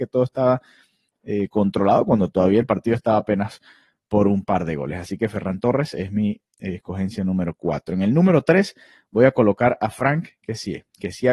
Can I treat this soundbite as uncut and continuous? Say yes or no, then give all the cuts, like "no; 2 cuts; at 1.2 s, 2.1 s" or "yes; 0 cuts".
yes; 0 cuts